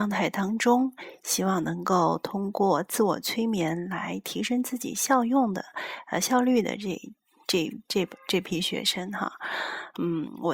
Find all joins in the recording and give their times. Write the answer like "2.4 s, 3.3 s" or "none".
none